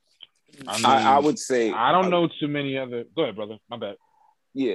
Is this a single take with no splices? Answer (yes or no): yes